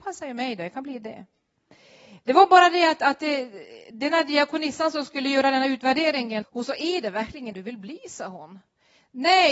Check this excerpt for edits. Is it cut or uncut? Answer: cut